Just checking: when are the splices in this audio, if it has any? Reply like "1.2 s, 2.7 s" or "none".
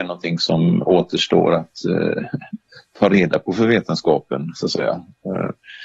none